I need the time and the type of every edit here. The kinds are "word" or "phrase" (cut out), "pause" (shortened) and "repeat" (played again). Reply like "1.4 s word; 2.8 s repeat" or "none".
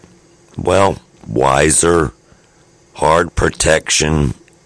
3.3 s word